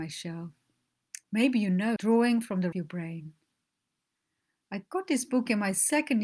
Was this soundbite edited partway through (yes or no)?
yes